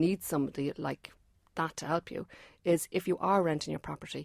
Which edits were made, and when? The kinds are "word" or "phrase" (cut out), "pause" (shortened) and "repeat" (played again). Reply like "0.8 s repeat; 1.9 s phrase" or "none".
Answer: none